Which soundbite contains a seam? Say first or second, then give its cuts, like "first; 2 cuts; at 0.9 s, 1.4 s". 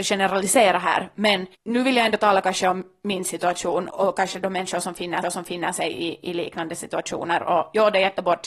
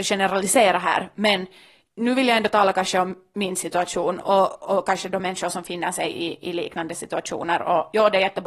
first; 3 cuts; at 1.5 s, 3.9 s, 5.2 s